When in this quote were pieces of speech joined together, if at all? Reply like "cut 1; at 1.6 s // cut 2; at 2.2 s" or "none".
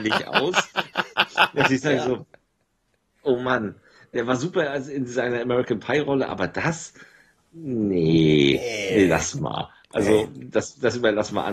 none